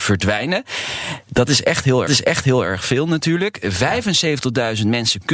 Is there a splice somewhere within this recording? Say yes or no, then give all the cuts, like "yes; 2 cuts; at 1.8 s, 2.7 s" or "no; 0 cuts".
yes; 1 cut; at 2.1 s